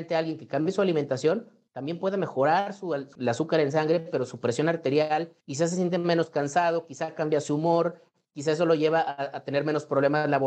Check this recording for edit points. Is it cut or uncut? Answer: uncut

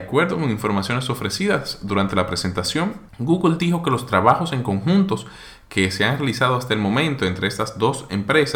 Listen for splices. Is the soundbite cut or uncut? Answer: cut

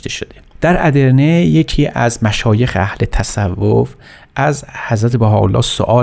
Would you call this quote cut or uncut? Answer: uncut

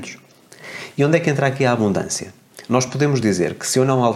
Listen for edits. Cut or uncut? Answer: uncut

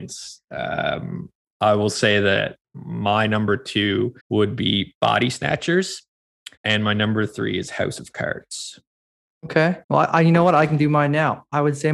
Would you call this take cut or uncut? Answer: cut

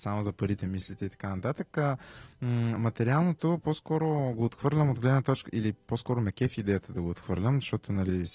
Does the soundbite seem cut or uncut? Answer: uncut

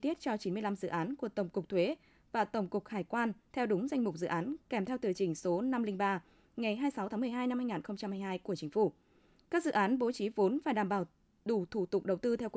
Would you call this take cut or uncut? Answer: uncut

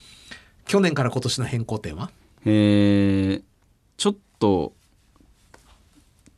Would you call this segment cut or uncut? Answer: cut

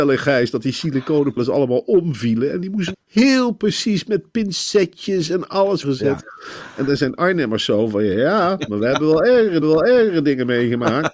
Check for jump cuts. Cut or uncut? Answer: cut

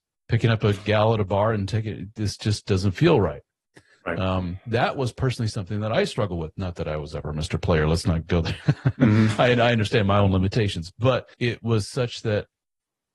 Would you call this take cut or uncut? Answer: cut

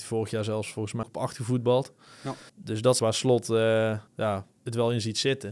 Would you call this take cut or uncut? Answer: cut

